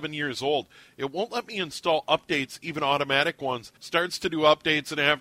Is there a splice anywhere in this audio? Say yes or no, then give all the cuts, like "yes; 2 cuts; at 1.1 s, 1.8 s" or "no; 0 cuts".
yes; 1 cut; at 3.8 s